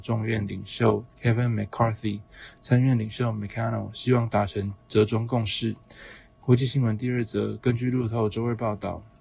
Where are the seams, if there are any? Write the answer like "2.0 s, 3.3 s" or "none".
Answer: 1.1 s, 4.8 s